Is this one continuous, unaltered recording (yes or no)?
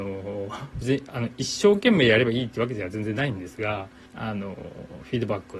no